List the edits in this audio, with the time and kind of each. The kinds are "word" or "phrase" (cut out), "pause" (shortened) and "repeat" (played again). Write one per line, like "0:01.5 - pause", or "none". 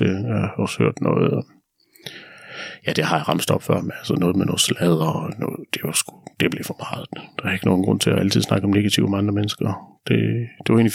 none